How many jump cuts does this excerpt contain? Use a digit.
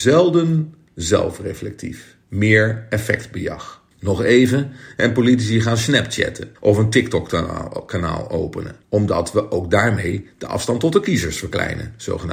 4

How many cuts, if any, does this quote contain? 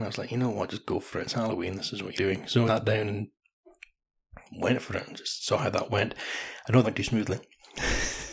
4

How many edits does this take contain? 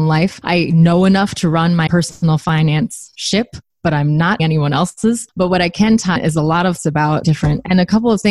5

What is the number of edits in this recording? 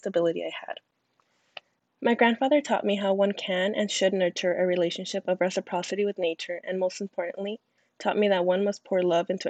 0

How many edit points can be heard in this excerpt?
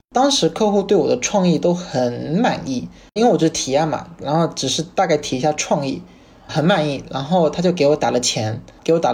2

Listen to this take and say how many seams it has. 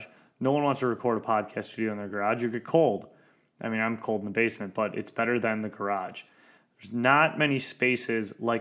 0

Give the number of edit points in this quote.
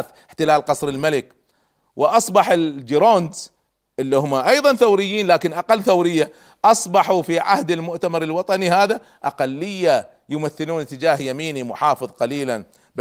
0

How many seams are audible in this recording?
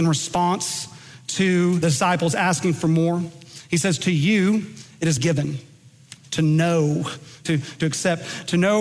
5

